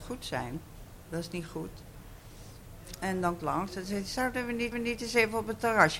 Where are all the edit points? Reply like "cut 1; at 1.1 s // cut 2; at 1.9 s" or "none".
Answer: cut 1; at 3.4 s // cut 2; at 4.7 s

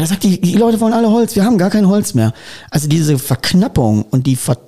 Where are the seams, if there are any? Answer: none

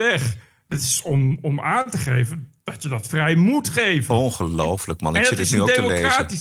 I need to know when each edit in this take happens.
none

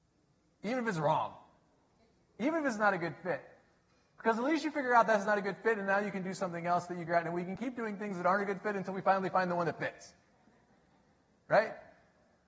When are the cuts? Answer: cut 1; at 7.1 s

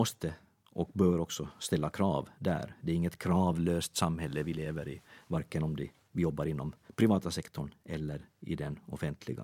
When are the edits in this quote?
none

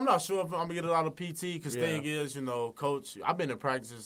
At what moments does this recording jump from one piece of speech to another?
none

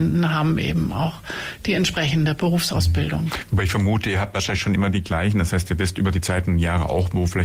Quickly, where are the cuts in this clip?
none

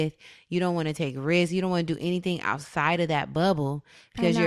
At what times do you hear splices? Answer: none

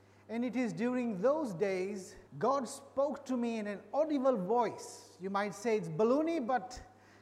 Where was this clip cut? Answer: cut 1; at 2.3 s

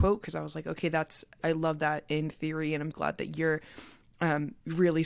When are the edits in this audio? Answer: cut 1; at 1.4 s // cut 2; at 2.9 s

